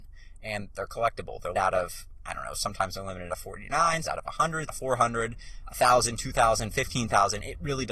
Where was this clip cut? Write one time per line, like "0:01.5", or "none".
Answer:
0:01.5
0:03.3
0:04.0
0:04.7